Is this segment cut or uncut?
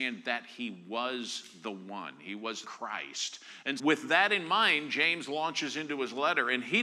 cut